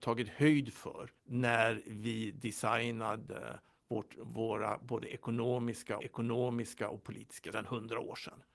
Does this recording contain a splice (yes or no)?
yes